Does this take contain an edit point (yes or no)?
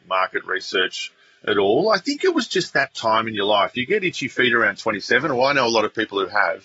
no